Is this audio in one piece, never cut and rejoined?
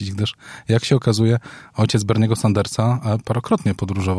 yes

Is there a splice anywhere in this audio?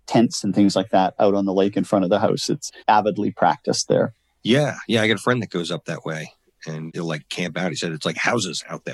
yes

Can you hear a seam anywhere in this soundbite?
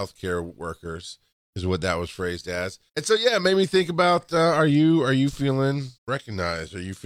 yes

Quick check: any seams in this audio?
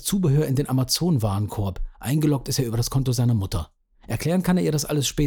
no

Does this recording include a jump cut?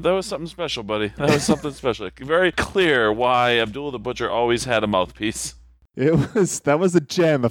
no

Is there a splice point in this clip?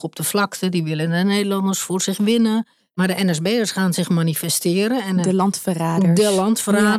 no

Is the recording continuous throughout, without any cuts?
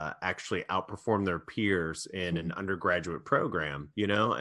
yes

